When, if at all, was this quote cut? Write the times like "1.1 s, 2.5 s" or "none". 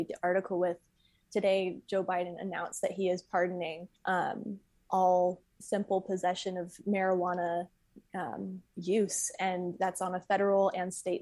4.0 s, 8.7 s